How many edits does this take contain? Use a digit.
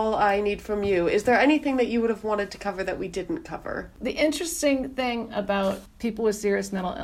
0